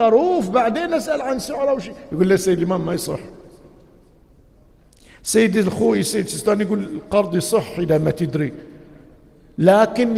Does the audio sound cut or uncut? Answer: uncut